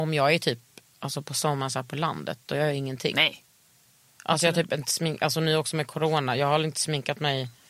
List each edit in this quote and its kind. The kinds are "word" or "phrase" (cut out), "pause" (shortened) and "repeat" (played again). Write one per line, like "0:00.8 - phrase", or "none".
none

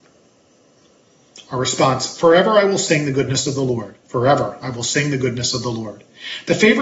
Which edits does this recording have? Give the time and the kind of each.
0:04.0 - pause

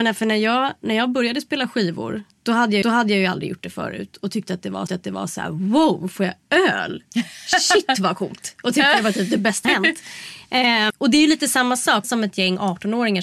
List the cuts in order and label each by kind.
0:02.3 - pause
0:02.8 - repeat
0:04.9 - repeat
0:09.6 - phrase
0:10.9 - word
0:12.0 - phrase

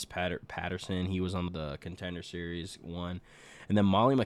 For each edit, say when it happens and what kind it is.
0:01.5 - word

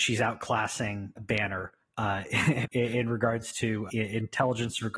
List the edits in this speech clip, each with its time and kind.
0:01.2 - word
0:02.6 - word
0:03.9 - word

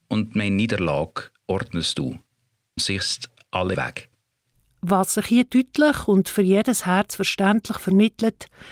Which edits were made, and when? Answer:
0:02.8 - word
0:03.7 - word

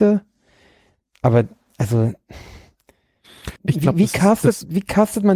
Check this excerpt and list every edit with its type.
0:03.6 - pause

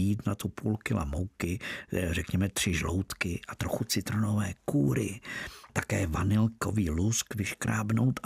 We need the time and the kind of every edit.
0:05.7 - word

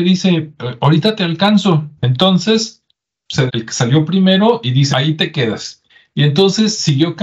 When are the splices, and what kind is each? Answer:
0:02.0 - pause
0:03.5 - word
0:04.9 - word
0:05.9 - pause

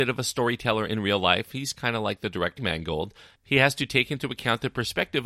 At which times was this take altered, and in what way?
0:02.6 - word

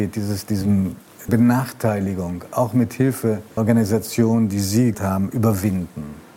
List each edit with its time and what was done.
0:01.3 - word
0:03.6 - word
0:04.9 - word

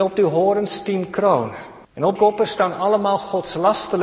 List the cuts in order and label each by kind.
0:01.8 - pause
0:02.2 - word

